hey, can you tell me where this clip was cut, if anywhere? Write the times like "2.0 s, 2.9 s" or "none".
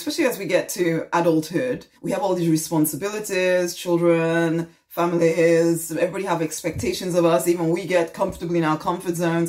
2.0 s